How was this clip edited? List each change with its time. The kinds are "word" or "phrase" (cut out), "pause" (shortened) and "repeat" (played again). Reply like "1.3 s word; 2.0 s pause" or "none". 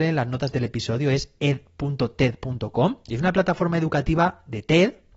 3.0 s pause